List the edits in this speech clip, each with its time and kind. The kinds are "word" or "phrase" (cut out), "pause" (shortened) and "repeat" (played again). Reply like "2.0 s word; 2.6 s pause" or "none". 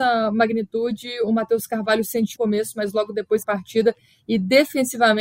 2.4 s phrase; 3.4 s phrase